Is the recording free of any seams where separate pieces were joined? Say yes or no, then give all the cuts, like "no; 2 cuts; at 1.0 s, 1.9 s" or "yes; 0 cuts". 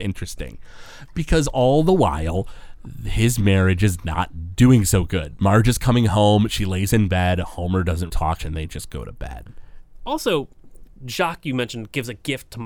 no; 2 cuts; at 8.1 s, 8.4 s